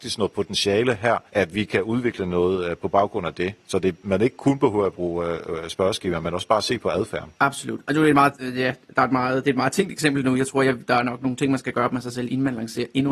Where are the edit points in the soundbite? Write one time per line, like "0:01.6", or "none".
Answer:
0:01.3
0:07.3